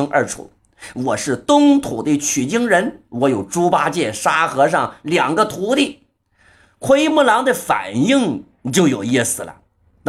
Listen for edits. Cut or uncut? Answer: uncut